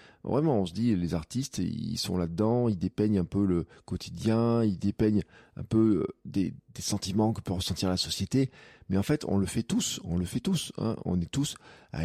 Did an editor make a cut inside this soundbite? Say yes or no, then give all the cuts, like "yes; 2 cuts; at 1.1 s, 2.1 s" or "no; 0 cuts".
no; 0 cuts